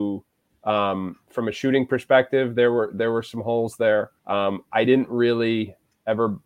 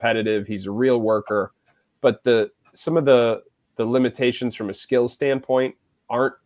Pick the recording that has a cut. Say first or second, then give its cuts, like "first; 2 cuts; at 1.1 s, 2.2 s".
first; 1 cut; at 4.2 s